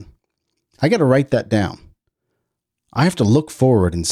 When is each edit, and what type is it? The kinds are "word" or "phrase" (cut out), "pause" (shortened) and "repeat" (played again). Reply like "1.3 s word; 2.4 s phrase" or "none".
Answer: none